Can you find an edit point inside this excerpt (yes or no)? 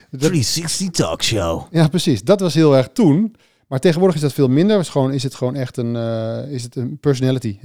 no